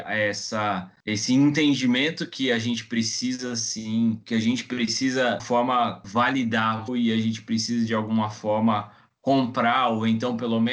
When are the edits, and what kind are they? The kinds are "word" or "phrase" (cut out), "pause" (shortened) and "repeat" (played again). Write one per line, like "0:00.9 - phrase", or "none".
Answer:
0:04.2 - word
0:05.4 - phrase
0:06.9 - word